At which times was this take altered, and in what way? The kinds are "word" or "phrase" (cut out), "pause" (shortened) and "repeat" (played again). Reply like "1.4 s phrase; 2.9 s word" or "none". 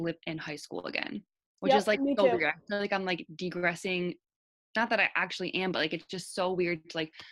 none

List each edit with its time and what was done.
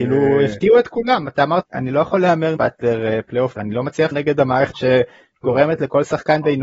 1.6 s word; 2.6 s word; 3.6 s word; 4.1 s word; 4.7 s word

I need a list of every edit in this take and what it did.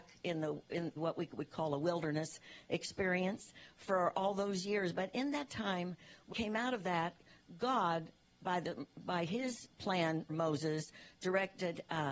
1.0 s word; 6.3 s word; 10.3 s word

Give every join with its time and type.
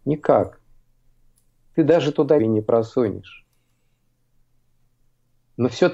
2.4 s word

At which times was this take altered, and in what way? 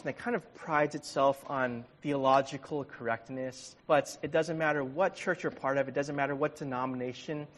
3.8 s pause

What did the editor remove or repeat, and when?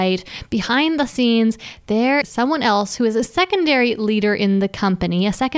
2.2 s word

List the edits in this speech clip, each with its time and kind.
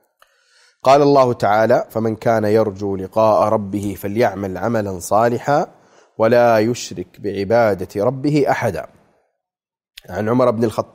none

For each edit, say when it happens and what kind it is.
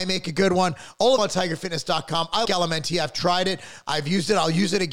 1.2 s word; 2.4 s word

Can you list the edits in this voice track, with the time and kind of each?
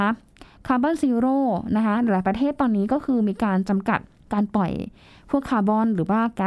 4.2 s pause

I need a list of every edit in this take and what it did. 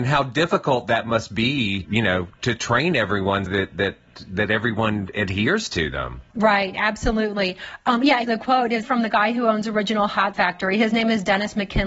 1.8 s word; 3.5 s word; 8.2 s word; 8.8 s word; 10.3 s word

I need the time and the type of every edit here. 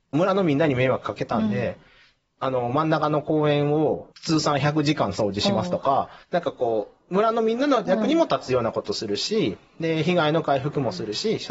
4.1 s pause; 6.2 s pause

